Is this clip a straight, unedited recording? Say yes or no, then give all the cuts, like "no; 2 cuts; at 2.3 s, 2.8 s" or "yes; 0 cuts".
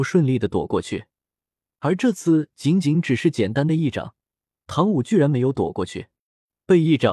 yes; 0 cuts